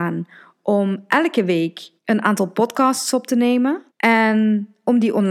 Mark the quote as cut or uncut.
cut